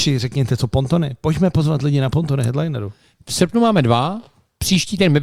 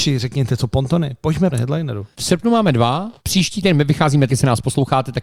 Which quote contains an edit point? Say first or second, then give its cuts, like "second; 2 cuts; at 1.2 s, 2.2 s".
second; 4 cuts; at 1.5 s, 2.1 s, 3.2 s, 4.3 s